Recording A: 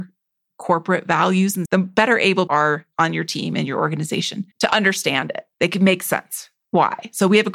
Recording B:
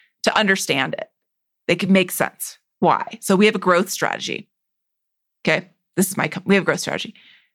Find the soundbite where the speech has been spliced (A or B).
A